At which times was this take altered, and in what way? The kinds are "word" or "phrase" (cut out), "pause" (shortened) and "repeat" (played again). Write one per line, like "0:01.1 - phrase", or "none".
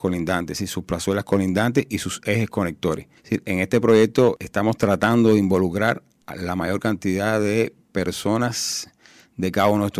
0:03.2 - pause